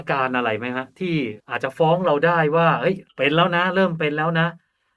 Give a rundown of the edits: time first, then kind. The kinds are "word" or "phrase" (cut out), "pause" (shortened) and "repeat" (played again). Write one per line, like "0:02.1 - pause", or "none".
0:01.4 - pause
0:03.1 - pause